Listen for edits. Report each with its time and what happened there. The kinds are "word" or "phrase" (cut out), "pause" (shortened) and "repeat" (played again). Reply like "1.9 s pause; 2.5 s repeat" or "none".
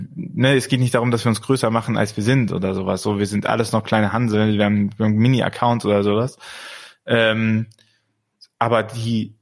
none